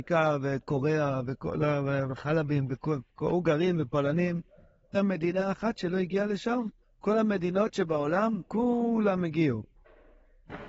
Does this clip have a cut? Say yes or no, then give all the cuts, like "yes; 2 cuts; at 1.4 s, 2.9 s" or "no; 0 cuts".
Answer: yes; 3 cuts; at 3.1 s, 4.9 s, 6.8 s